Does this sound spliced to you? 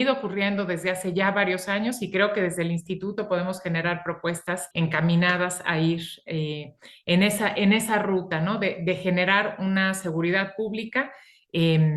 yes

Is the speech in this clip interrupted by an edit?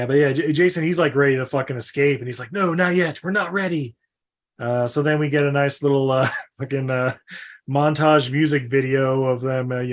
no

